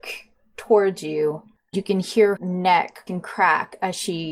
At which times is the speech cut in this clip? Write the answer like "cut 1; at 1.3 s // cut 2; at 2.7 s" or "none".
cut 1; at 1.7 s // cut 2; at 2.4 s // cut 3; at 3.1 s